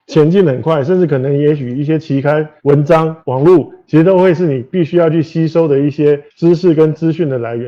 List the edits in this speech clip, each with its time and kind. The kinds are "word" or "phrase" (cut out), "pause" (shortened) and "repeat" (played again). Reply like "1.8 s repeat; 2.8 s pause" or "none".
2.6 s pause; 3.2 s pause; 6.3 s pause